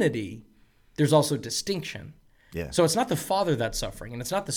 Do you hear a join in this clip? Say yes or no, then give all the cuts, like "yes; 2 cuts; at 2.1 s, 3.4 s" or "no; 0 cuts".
no; 0 cuts